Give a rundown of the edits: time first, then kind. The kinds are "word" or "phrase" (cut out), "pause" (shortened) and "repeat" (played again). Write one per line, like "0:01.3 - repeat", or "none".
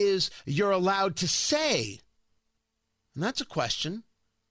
none